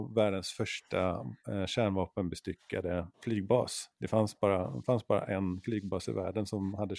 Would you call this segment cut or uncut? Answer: cut